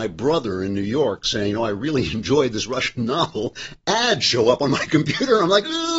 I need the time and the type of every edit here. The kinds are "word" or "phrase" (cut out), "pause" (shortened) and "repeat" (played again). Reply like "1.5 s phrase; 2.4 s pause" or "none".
none